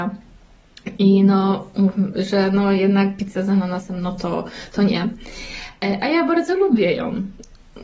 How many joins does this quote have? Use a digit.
0